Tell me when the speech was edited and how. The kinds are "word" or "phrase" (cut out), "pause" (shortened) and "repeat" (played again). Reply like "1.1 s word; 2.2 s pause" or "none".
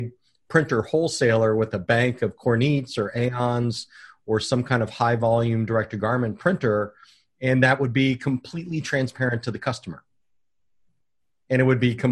none